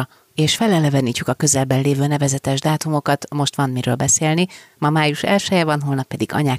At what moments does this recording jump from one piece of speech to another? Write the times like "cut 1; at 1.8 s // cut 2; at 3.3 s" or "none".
none